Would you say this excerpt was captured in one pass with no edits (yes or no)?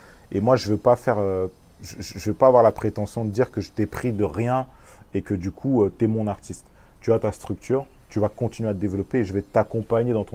yes